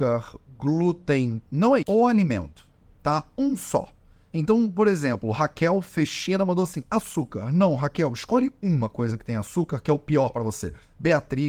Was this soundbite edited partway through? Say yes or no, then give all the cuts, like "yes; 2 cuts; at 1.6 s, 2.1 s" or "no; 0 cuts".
yes; 1 cut; at 1.8 s